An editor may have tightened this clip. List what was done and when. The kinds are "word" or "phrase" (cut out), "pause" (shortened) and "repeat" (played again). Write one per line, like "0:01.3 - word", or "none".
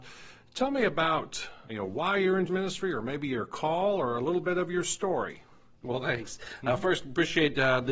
0:01.7 - word
0:02.5 - word